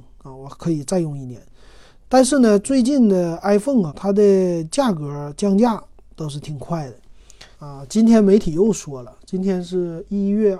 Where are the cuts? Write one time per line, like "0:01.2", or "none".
0:03.9
0:07.5